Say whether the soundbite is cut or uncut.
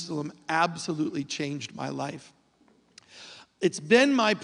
uncut